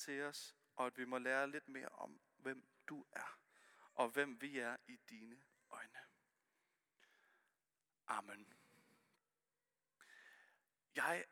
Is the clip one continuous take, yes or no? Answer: yes